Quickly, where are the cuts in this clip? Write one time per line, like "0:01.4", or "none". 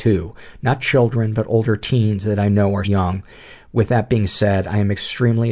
0:02.8